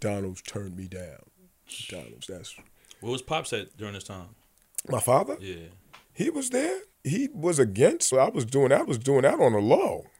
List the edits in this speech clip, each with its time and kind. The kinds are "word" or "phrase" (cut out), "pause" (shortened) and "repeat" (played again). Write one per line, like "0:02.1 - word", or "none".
0:06.0 - pause
0:06.9 - pause
0:08.1 - phrase
0:08.8 - repeat